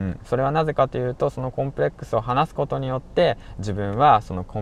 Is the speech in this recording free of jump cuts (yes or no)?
yes